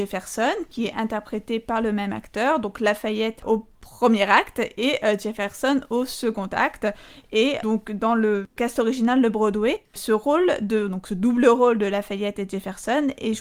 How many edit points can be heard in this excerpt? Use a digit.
0